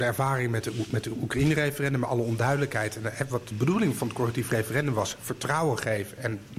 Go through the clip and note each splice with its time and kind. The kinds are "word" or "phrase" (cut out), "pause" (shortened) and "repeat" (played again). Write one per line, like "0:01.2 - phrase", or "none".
none